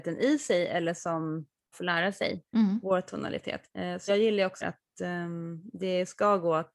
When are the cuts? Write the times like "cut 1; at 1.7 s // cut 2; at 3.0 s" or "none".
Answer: cut 1; at 1.7 s // cut 2; at 2.5 s // cut 3; at 3.7 s // cut 4; at 4.1 s // cut 5; at 4.6 s